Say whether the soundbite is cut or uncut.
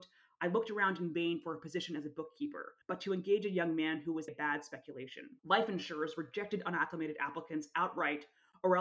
cut